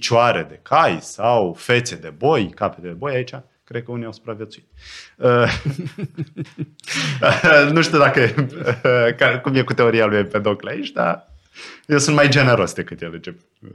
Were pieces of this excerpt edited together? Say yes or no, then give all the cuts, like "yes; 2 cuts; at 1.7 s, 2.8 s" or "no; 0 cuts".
no; 0 cuts